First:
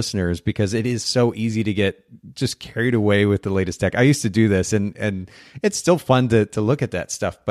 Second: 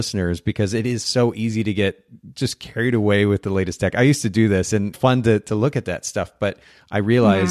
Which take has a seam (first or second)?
second